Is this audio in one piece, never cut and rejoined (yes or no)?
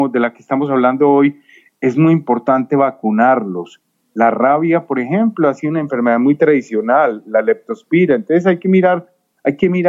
yes